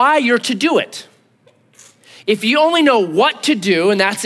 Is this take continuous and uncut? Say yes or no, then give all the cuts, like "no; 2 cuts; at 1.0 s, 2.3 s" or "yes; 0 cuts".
yes; 0 cuts